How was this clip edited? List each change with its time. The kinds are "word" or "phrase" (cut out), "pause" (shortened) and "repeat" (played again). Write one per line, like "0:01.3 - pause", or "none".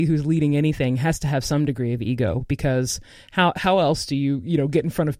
none